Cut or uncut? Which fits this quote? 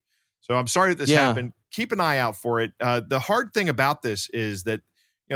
uncut